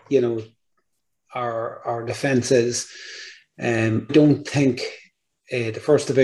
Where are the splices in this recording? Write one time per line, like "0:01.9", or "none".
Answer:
0:04.1